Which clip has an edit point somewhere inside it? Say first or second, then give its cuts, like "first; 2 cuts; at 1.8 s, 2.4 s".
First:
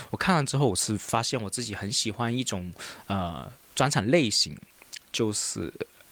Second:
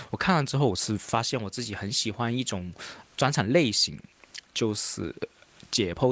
second; 1 cut; at 3.0 s